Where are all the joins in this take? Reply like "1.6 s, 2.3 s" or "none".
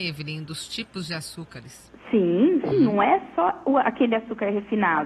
2.7 s